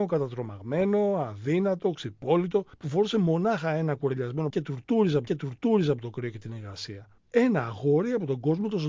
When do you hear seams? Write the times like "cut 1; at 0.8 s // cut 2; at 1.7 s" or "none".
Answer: cut 1; at 2.7 s // cut 2; at 4.5 s // cut 3; at 5.3 s // cut 4; at 7.2 s

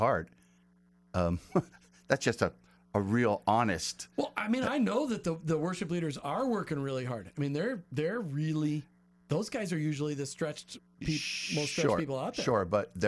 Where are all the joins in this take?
none

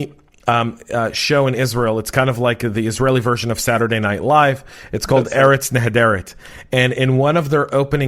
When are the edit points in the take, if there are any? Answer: none

